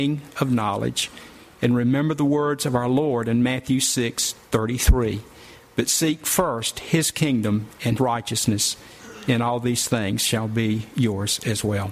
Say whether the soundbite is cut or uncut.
cut